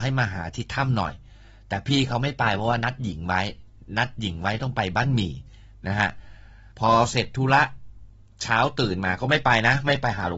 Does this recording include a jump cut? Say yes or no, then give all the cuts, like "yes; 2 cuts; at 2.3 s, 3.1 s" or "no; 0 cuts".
yes; 1 cut; at 6.7 s